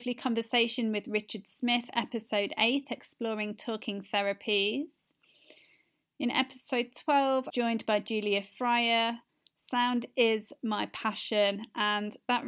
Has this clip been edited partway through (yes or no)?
yes